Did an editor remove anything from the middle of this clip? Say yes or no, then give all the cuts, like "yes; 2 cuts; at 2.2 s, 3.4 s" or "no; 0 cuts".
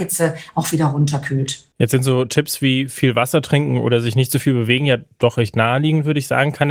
no; 0 cuts